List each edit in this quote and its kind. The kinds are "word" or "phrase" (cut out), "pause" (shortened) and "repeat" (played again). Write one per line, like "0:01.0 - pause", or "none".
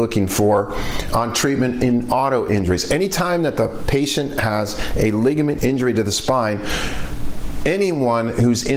0:05.6 - word